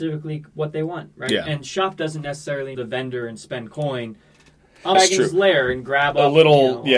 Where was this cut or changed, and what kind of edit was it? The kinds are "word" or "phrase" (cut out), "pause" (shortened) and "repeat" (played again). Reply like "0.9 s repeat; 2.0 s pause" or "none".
2.7 s phrase; 4.9 s word